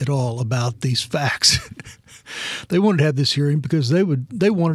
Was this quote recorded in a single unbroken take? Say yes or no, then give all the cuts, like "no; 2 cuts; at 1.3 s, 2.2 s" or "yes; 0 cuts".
yes; 0 cuts